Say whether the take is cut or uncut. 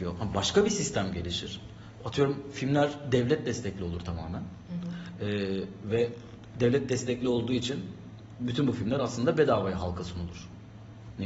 uncut